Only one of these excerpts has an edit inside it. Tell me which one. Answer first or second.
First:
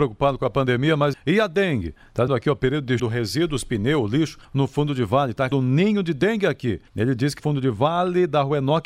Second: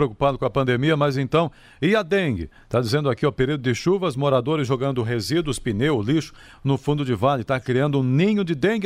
first